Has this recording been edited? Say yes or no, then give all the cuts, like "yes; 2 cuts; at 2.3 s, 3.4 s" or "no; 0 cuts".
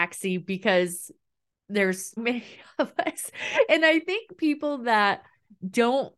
yes; 1 cut; at 2.2 s